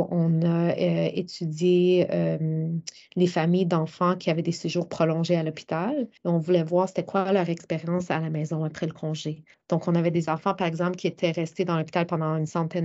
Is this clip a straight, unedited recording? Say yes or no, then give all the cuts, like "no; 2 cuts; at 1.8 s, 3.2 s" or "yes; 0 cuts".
no; 2 cuts; at 6.2 s, 9.5 s